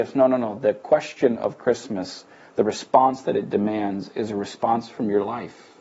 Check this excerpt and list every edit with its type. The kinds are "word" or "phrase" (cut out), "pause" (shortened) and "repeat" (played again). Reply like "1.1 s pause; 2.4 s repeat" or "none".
none